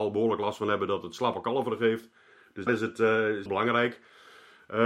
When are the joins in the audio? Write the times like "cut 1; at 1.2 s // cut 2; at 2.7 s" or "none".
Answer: cut 1; at 2.7 s // cut 2; at 3.5 s